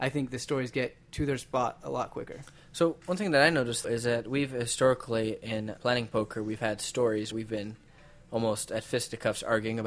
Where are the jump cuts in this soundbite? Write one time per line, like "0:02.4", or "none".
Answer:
0:03.8
0:05.8
0:07.3